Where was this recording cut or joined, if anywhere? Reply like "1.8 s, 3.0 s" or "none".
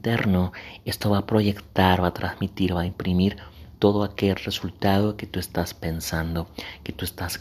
none